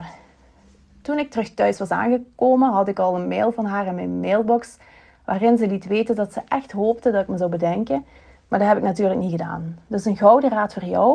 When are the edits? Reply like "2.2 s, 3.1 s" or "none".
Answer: none